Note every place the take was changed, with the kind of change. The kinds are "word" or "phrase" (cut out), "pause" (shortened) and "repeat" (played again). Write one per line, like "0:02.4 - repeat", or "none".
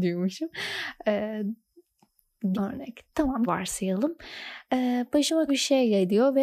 0:02.5 - word
0:03.5 - word
0:05.5 - word